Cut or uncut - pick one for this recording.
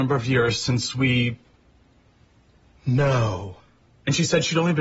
uncut